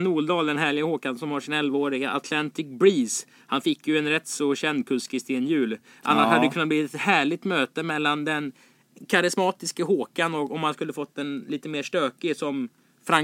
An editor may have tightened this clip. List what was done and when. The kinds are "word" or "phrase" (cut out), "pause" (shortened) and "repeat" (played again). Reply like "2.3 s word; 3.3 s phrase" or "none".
none